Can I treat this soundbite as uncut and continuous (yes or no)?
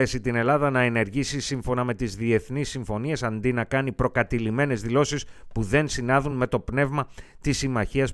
yes